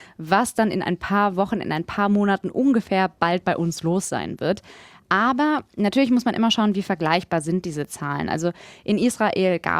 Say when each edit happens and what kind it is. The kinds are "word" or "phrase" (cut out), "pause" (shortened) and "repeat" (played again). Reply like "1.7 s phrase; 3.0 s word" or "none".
none